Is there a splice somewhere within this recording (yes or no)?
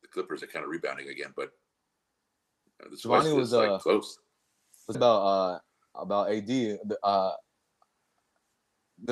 yes